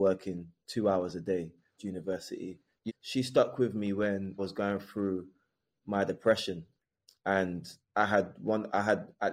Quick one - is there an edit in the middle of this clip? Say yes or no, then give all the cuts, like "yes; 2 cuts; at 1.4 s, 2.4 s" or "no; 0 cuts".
yes; 3 cuts; at 1.8 s, 2.9 s, 4.4 s